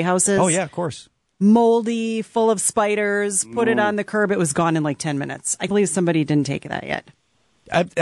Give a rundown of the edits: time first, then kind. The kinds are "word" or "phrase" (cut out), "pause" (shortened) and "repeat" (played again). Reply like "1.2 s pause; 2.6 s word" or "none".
5.7 s word